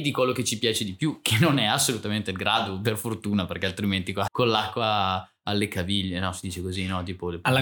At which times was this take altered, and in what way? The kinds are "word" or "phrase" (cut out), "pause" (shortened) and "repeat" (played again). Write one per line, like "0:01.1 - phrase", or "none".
0:04.3 - word